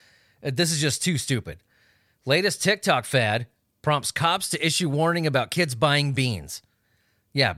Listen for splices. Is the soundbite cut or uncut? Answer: uncut